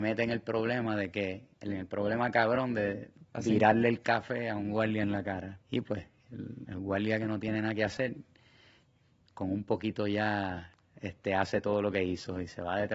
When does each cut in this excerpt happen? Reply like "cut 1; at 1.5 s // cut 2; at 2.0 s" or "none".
cut 1; at 1.5 s // cut 2; at 5.6 s